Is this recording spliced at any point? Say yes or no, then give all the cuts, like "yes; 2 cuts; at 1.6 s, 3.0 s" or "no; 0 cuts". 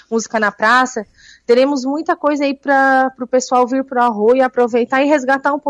no; 0 cuts